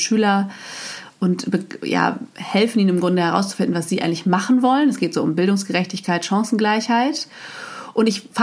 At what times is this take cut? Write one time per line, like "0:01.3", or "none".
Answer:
none